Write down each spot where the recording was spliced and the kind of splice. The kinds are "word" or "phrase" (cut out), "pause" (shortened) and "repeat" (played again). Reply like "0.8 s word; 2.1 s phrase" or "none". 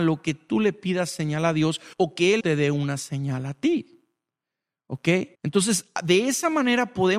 1.9 s pause; 2.4 s word; 5.3 s pause

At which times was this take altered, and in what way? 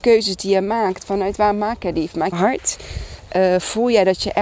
2.3 s phrase

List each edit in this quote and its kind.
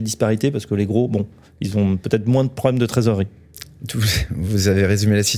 none

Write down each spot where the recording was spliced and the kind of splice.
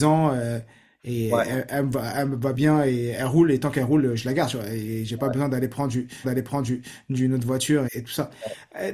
2.5 s phrase; 6.2 s repeat; 7.9 s word

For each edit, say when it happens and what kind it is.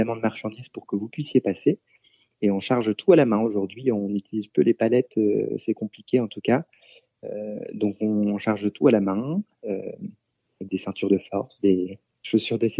none

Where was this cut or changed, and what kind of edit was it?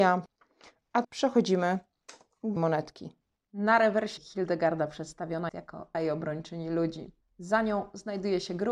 1.0 s word; 2.6 s word; 4.2 s word; 5.5 s word; 5.9 s word

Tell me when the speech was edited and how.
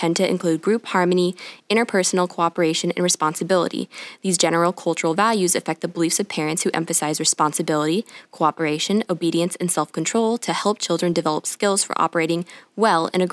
none

